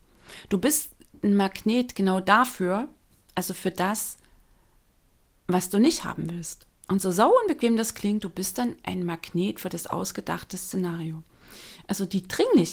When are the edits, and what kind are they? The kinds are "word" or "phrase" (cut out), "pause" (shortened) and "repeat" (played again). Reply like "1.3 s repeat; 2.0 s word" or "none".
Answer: 6.8 s pause